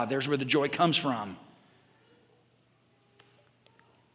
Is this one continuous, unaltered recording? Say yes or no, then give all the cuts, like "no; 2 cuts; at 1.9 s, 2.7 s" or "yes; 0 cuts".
yes; 0 cuts